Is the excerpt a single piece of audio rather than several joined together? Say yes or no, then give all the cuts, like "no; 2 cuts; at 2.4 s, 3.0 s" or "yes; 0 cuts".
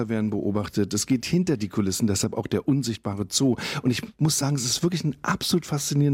yes; 0 cuts